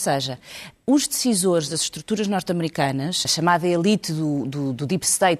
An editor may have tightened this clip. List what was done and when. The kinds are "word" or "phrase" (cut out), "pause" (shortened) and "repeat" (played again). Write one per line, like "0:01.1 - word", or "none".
0:03.2 - word